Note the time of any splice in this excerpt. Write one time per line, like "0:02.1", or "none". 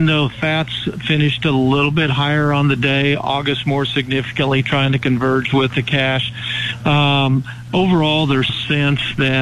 0:08.5